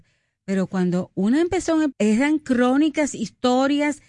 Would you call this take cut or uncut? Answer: cut